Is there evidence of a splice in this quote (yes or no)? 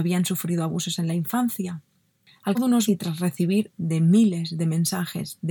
yes